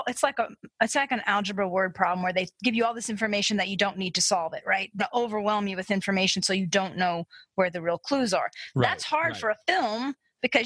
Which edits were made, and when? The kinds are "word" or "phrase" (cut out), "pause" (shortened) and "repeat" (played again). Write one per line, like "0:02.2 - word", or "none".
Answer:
0:05.0 - word